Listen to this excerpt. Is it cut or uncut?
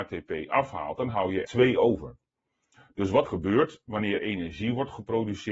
cut